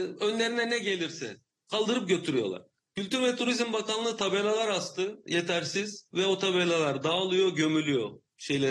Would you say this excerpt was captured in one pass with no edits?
yes; 0 cuts

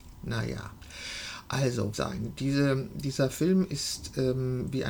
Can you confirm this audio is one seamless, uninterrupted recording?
no; 1 cut; at 1.9 s

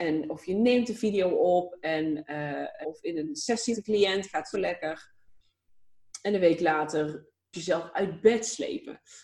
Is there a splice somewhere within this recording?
yes; 4 cuts; at 2.8 s, 3.7 s, 4.5 s, 7.5 s

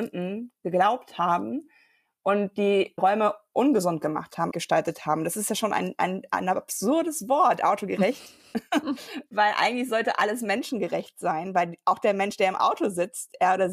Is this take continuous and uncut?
no; 1 cut; at 4.5 s

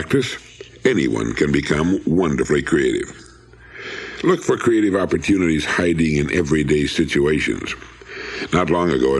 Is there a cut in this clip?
no; 0 cuts

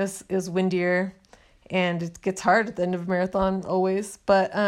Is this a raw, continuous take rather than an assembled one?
yes; 0 cuts

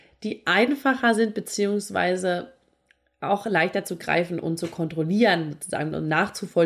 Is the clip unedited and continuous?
yes; 0 cuts

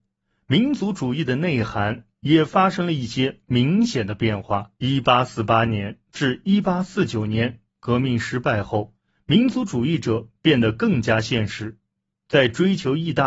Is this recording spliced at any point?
yes; 1 cut; at 4.8 s

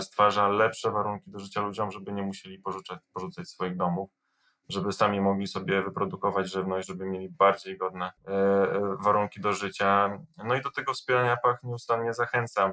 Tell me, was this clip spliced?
yes; 1 cut; at 8.2 s

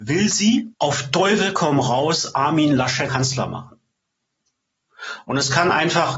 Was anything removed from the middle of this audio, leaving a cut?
yes; 1 cut; at 3.1 s

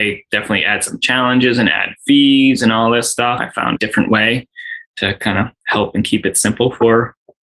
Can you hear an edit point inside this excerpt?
yes; 2 cuts; at 3.4 s, 3.8 s

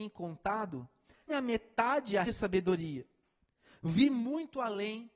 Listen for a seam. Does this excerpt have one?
yes; 2 cuts; at 1.3 s, 2.3 s

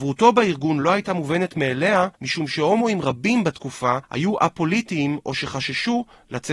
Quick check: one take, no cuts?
no; 2 cuts; at 2.1 s, 4.0 s

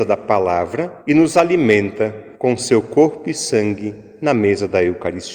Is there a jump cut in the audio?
yes; 2 cuts; at 1.0 s, 2.3 s

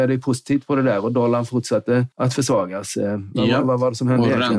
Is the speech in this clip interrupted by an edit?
yes; 1 cut; at 2.1 s

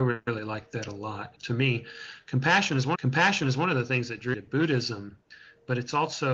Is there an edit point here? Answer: yes; 3 cuts; at 1.4 s, 3.0 s, 4.3 s

